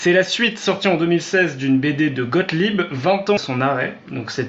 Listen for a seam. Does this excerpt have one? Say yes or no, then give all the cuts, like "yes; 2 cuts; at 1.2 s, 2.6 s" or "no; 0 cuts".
yes; 1 cut; at 3.4 s